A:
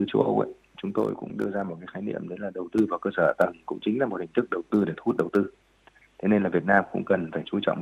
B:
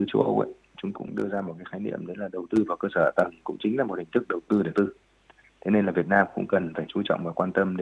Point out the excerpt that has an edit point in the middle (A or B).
B